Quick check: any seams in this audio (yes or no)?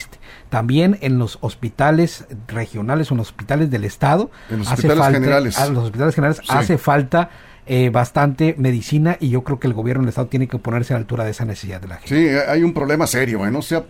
no